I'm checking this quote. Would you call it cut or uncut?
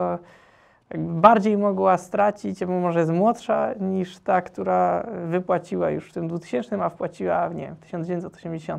uncut